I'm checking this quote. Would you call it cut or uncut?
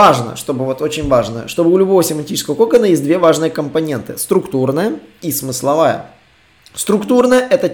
uncut